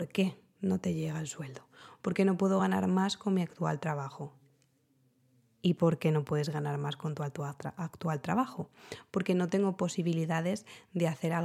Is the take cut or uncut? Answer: uncut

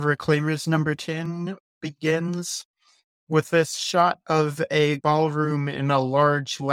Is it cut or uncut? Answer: cut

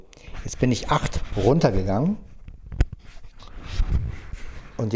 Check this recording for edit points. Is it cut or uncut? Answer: uncut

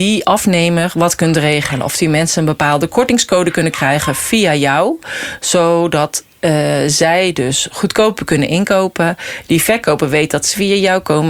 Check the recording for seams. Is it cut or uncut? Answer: uncut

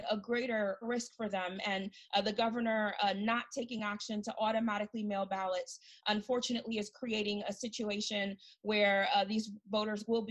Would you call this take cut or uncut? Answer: uncut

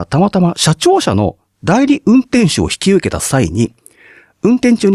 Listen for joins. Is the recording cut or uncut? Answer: uncut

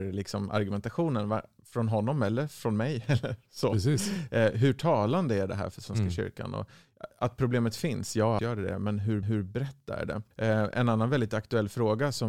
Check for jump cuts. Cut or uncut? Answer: cut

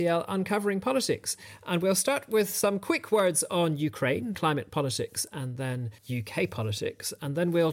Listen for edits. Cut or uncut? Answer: cut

